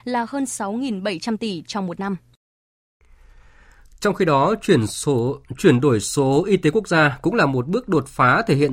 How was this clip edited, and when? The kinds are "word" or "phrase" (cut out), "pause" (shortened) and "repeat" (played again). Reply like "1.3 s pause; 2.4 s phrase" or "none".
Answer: none